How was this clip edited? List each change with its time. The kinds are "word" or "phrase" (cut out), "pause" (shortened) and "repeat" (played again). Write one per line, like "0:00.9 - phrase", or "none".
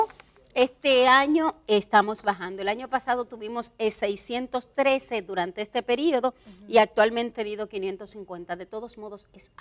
0:07.3 - word